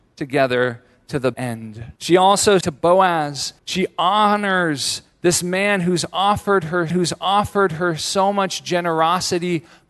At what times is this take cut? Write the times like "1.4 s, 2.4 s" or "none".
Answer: 1.3 s, 2.0 s, 2.6 s, 3.6 s, 6.9 s